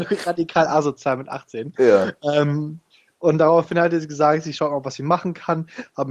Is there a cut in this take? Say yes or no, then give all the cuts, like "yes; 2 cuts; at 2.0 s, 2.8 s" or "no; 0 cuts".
no; 0 cuts